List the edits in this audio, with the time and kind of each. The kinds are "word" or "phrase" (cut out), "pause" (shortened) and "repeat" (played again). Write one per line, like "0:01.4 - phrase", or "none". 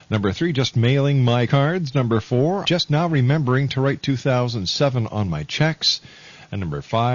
0:01.5 - word
0:02.6 - word